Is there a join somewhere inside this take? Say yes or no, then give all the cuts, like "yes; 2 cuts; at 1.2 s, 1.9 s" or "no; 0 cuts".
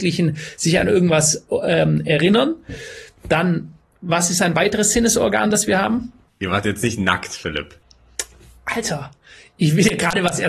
no; 0 cuts